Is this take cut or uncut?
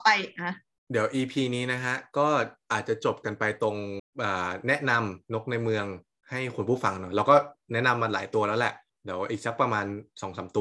uncut